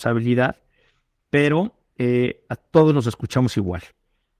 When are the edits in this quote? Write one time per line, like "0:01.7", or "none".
none